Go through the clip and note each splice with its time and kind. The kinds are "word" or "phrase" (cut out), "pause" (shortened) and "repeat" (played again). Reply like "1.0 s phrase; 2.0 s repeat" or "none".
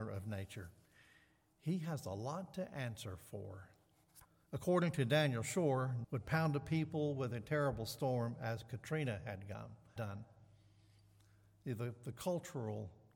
4.2 s pause; 6.0 s phrase; 10.0 s word

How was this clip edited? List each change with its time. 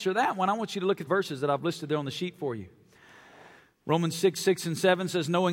1.1 s word

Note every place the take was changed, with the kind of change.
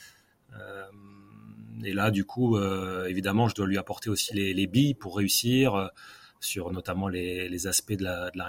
none

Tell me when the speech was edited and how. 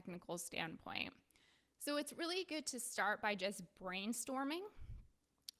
none

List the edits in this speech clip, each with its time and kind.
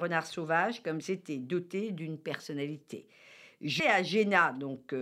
1.0 s word; 3.8 s word

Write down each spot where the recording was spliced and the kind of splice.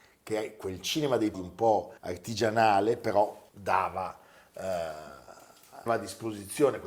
1.3 s word; 2.0 s pause; 3.5 s pause; 5.9 s word

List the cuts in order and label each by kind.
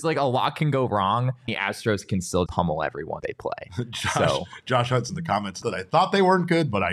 1.5 s word; 2.5 s word; 3.2 s word; 5.1 s word; 5.6 s word

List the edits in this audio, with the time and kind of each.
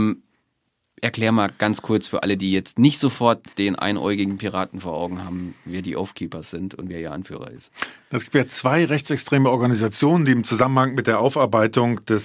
3.5 s pause

